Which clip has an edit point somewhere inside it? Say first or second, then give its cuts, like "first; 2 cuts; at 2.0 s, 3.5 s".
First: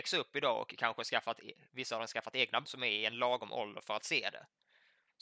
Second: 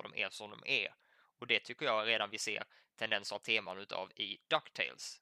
first; 1 cut; at 2.6 s